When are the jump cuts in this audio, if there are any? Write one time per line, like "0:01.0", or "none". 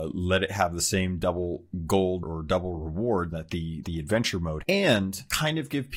0:02.2
0:03.3
0:03.8
0:04.6